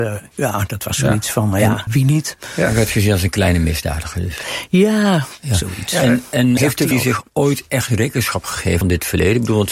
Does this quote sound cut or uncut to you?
cut